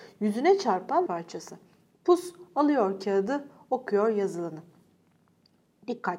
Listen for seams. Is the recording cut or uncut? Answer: cut